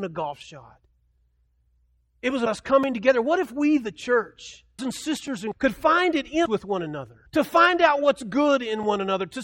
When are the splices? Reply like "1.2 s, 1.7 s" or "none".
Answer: 2.5 s, 4.8 s, 5.5 s, 6.5 s, 7.3 s